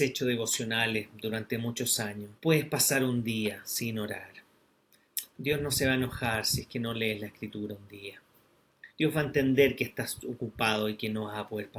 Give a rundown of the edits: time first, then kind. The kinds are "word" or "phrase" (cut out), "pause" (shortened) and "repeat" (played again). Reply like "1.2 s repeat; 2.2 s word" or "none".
2.4 s pause; 8.9 s pause